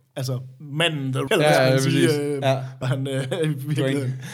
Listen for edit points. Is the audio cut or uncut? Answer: cut